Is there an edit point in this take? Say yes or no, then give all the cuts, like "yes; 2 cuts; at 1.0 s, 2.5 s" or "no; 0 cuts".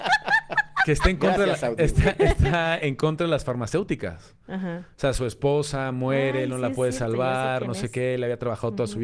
no; 0 cuts